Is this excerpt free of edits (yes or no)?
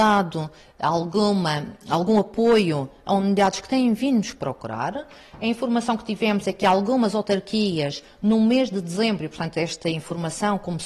yes